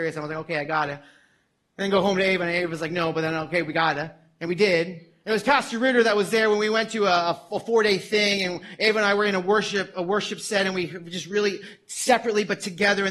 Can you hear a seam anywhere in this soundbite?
no; 0 cuts

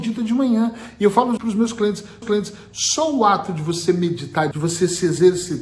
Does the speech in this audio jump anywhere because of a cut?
yes; 3 cuts; at 1.4 s, 2.2 s, 4.5 s

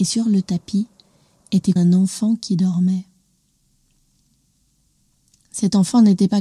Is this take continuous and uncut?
no; 1 cut; at 1.8 s

